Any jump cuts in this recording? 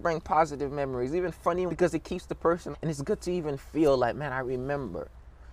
yes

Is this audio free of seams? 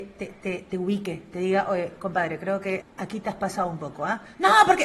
no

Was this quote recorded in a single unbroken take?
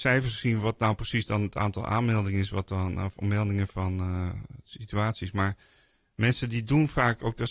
yes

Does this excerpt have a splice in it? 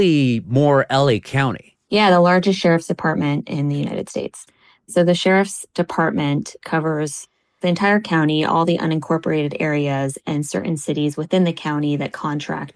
no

